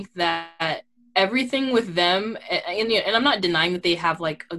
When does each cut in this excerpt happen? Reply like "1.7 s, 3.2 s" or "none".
1.0 s